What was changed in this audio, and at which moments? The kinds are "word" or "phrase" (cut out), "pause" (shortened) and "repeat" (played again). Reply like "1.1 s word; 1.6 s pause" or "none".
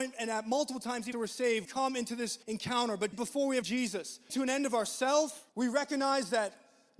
1.1 s word; 1.7 s word; 2.4 s pause; 3.1 s word; 3.6 s word; 4.3 s phrase; 5.5 s pause